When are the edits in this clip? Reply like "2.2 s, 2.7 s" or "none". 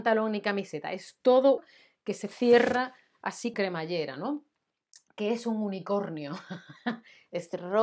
1.6 s, 3.5 s